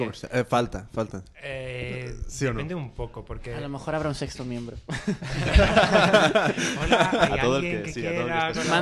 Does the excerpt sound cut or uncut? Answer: uncut